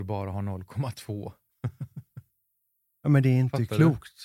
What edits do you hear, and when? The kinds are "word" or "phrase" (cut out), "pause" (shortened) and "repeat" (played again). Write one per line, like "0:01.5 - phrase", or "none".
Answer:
none